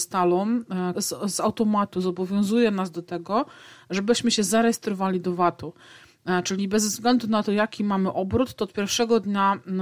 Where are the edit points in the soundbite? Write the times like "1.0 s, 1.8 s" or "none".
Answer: 0.9 s